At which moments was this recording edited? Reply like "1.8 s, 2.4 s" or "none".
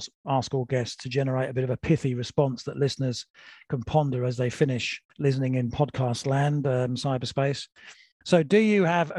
5.1 s